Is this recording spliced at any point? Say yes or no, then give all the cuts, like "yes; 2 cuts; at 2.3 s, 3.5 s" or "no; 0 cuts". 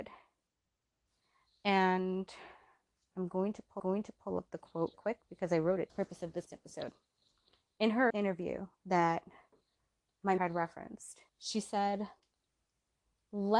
yes; 8 cuts; at 3.8 s, 4.9 s, 5.9 s, 6.5 s, 8.1 s, 8.7 s, 10.4 s, 11.3 s